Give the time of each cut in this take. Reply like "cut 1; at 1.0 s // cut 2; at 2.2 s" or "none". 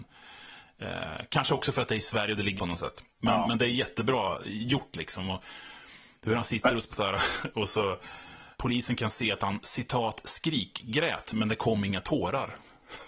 cut 1; at 2.6 s // cut 2; at 3.1 s // cut 3; at 6.9 s // cut 4; at 8.6 s